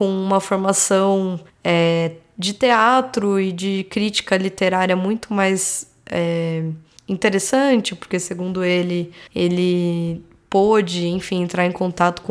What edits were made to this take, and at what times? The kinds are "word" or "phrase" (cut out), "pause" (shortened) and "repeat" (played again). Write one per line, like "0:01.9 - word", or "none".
0:01.5 - pause
0:07.0 - pause
0:09.3 - pause